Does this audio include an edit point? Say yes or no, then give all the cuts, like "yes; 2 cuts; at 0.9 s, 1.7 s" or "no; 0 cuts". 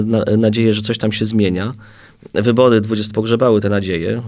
yes; 1 cut; at 3.1 s